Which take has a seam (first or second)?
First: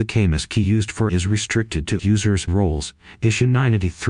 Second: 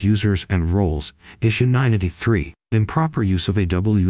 first